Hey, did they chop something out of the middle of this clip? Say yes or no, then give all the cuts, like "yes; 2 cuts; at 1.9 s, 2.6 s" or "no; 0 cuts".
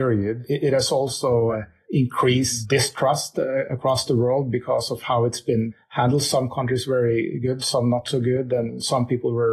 no; 0 cuts